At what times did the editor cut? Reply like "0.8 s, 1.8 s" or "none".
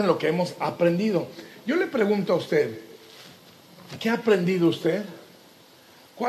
none